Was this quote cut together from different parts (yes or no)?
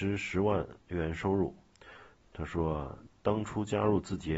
no